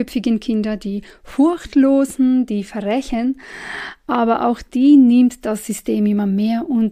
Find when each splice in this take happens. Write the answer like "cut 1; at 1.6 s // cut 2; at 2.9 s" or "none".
none